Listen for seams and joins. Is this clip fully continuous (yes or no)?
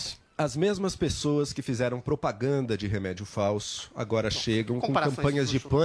yes